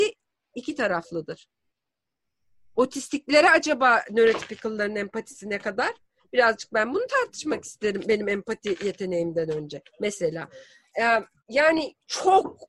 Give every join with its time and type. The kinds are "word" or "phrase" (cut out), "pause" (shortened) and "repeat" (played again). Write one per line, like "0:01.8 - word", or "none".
none